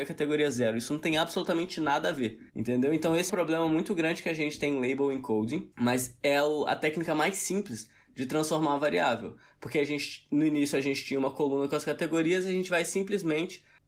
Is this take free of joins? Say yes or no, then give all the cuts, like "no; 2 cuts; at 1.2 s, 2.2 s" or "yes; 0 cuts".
no; 3 cuts; at 2.5 s, 3.3 s, 5.7 s